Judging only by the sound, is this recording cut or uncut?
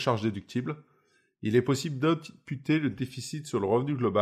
uncut